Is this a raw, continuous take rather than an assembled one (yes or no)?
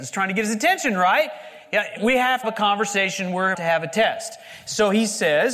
no